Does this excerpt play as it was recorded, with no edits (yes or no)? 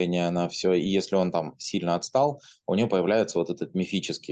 yes